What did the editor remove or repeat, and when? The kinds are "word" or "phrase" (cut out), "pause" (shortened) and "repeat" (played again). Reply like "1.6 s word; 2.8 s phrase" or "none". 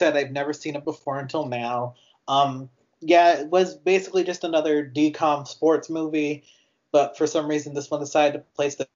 none